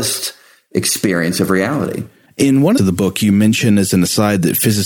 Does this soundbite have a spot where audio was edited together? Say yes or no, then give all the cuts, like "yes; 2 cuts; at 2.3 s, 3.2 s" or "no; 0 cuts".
yes; 2 cuts; at 2.3 s, 2.8 s